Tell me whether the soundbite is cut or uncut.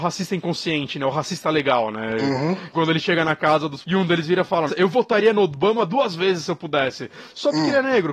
cut